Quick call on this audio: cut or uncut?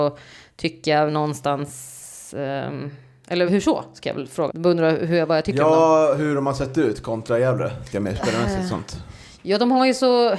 cut